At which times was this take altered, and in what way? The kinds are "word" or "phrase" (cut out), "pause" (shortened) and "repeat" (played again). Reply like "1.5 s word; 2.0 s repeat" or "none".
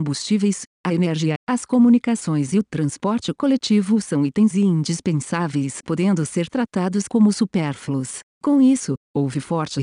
1.4 s word; 4.5 s word; 5.8 s word